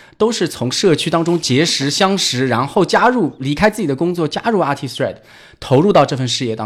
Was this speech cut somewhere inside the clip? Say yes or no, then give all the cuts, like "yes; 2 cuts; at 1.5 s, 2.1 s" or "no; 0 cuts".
no; 0 cuts